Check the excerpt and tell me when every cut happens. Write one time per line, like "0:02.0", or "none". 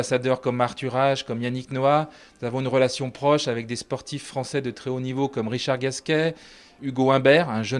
none